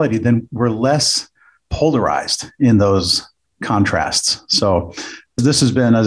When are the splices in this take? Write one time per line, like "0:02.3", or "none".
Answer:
0:03.4